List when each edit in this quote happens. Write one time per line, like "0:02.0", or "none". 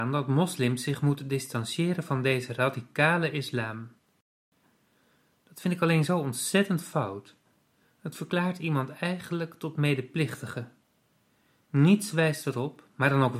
none